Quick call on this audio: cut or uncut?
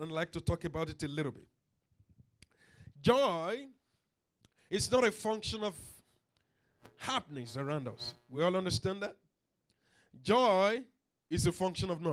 uncut